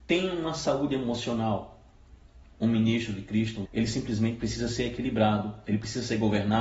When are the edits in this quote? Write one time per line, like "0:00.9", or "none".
0:03.7